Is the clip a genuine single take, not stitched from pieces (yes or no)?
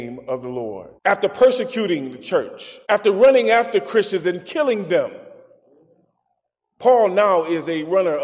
no